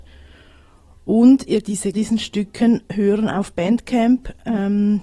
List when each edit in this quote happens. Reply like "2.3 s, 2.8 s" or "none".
1.6 s, 1.9 s, 2.9 s